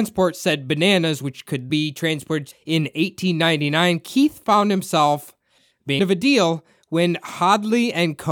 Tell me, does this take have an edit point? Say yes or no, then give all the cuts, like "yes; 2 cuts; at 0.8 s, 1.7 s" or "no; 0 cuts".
yes; 3 cuts; at 1.7 s, 2.5 s, 6.0 s